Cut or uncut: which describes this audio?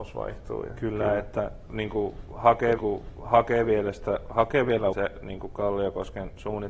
cut